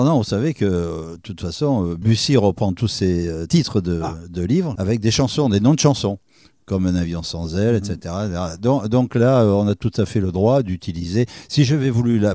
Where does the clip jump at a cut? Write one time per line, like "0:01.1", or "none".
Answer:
none